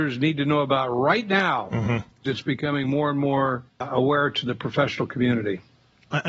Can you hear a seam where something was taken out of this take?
yes; 2 cuts; at 2.2 s, 3.7 s

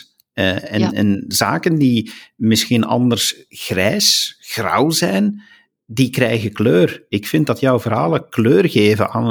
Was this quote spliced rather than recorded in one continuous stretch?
no; 0 cuts

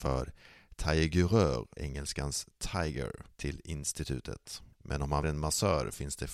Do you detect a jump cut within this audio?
yes; 4 cuts; at 1.8 s, 3.3 s, 4.7 s, 5.2 s

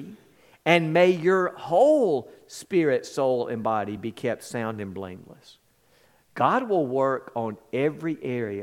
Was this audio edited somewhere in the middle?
no; 0 cuts

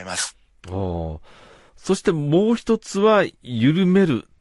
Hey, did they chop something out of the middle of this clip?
no; 0 cuts

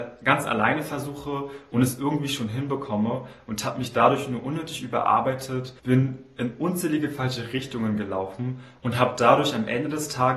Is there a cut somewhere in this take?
yes; 1 cut; at 5.8 s

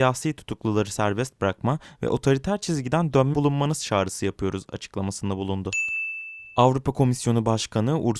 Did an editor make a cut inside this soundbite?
yes; 1 cut; at 3.3 s

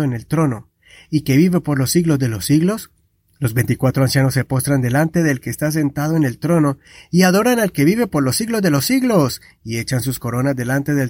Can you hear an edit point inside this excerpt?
no; 0 cuts

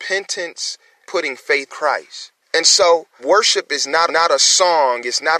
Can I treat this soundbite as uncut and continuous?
no; 5 cuts; at 1.1 s, 1.7 s, 2.4 s, 3.2 s, 4.1 s

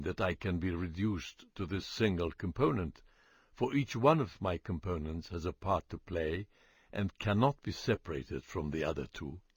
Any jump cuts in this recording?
no; 0 cuts

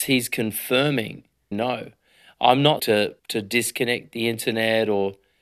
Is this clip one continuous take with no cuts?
no; 3 cuts; at 1.5 s, 2.8 s, 3.2 s

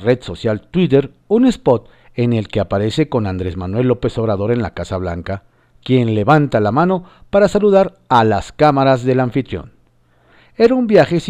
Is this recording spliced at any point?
no; 0 cuts

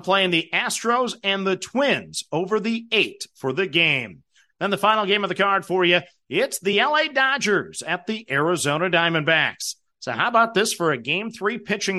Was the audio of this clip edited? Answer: no; 0 cuts

